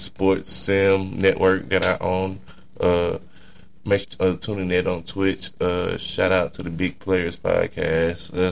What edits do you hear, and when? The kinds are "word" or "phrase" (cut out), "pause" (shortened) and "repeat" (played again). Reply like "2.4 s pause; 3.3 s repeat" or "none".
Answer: 4.0 s word